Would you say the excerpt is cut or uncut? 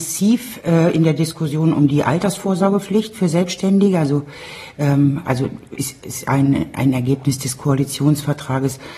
uncut